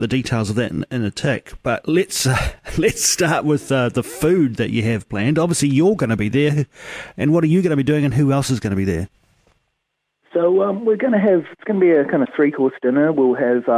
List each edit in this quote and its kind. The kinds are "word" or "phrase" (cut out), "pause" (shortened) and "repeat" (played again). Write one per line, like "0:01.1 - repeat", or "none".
none